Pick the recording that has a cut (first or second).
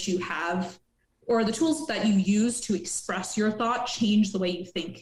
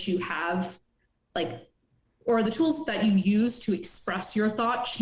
first